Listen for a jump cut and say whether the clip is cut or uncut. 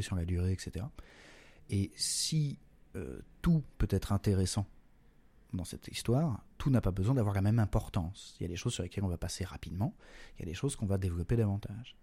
uncut